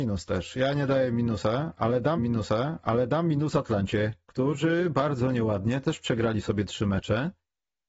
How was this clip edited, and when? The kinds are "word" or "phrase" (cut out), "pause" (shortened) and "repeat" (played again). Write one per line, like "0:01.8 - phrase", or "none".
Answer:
0:02.2 - repeat